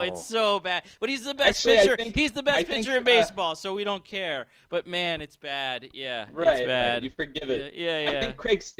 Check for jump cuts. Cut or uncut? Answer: uncut